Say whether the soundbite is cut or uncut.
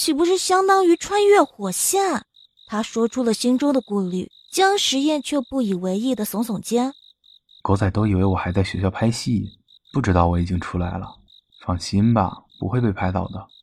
cut